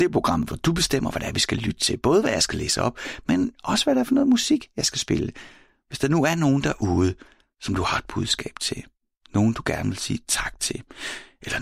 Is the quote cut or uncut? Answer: uncut